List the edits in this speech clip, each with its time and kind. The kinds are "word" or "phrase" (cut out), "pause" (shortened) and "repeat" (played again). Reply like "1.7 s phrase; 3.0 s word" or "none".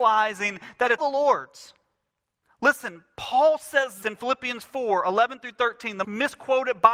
1.0 s word; 4.0 s word; 6.0 s word